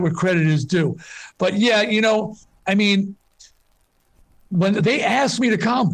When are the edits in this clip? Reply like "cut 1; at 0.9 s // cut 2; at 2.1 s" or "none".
none